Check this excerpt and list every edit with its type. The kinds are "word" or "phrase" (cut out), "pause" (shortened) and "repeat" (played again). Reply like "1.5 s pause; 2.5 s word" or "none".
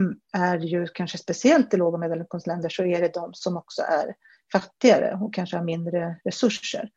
none